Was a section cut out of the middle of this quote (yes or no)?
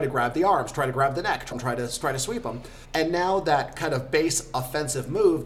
yes